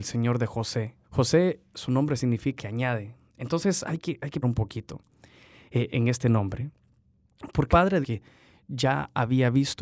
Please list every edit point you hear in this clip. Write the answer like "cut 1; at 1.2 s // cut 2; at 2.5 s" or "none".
cut 1; at 1.0 s // cut 2; at 2.6 s // cut 3; at 4.0 s // cut 4; at 4.4 s // cut 5; at 5.9 s // cut 6; at 7.7 s // cut 7; at 8.0 s

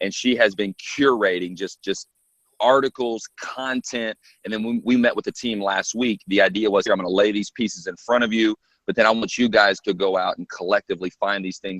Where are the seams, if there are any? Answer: none

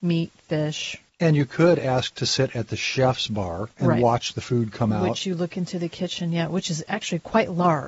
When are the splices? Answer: cut 1; at 1.1 s // cut 2; at 3.7 s

